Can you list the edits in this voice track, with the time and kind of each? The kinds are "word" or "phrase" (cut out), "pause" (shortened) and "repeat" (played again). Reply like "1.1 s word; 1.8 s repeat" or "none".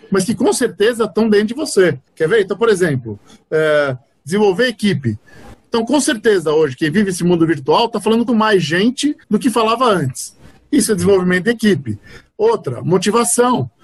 2.1 s pause; 8.3 s word; 9.2 s pause